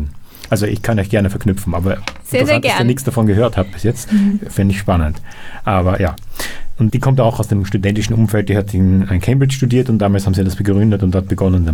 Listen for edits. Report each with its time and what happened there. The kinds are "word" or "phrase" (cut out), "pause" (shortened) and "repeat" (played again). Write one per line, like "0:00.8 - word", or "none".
0:06.9 - word